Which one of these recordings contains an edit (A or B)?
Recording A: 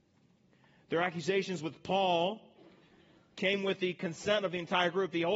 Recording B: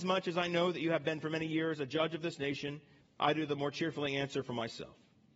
B